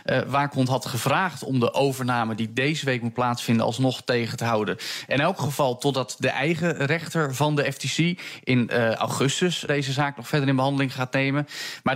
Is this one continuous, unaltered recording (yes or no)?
no